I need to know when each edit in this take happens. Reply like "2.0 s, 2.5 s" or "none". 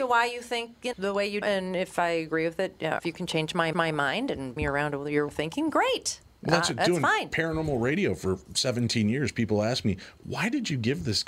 0.9 s, 1.4 s, 3.0 s, 3.7 s, 4.6 s, 5.3 s